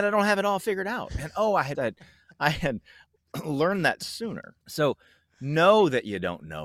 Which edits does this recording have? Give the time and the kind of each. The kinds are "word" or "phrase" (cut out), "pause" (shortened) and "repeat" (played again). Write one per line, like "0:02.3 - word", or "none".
0:01.7 - word
0:04.6 - pause